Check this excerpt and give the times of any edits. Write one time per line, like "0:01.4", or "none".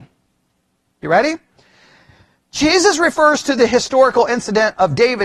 none